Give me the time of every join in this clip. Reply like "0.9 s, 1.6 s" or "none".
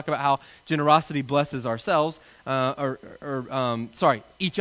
none

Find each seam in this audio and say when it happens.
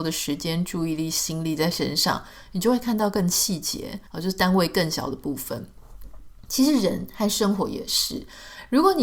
4.1 s

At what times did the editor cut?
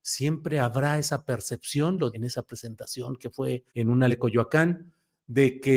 2.1 s, 3.7 s, 4.1 s

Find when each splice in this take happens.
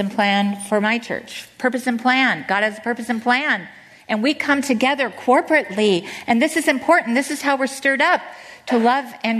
none

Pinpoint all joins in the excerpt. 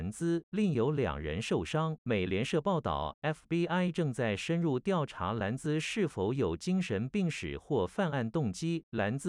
2.0 s

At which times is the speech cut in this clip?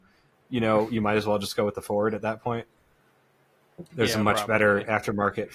none

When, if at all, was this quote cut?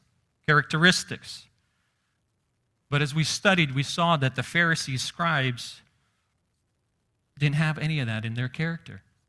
none

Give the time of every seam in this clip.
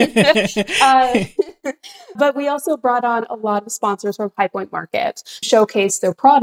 2.2 s, 5.4 s

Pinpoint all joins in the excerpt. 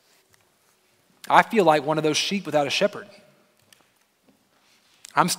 none

